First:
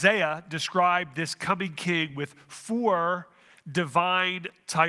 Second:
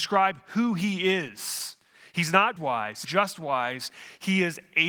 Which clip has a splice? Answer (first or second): second